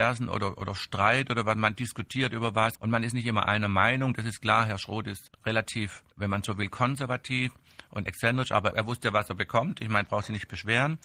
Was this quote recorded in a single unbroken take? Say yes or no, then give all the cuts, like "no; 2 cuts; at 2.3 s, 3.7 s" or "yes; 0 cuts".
no; 5 cuts; at 2.7 s, 5.3 s, 6.1 s, 8.1 s, 8.7 s